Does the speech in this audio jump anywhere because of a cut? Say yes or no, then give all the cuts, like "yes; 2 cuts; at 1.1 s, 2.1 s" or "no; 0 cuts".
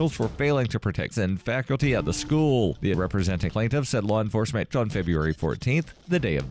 yes; 4 cuts; at 1.1 s, 2.9 s, 3.5 s, 4.7 s